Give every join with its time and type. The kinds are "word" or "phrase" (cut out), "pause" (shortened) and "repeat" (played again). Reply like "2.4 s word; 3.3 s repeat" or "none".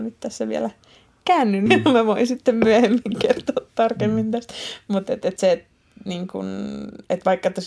1.7 s word; 5.4 s word